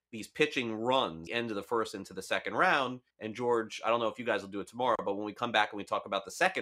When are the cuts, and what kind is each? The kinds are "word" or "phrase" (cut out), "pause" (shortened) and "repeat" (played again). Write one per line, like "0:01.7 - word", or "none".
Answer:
0:01.3 - phrase
0:03.1 - pause